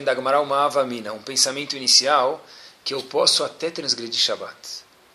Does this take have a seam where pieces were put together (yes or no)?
no